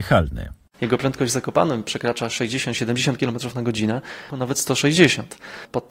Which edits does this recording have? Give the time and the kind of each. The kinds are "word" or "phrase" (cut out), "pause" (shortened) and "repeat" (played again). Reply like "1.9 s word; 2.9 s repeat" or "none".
4.3 s phrase